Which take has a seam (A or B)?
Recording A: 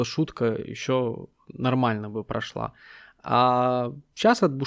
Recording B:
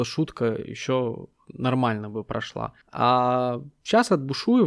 B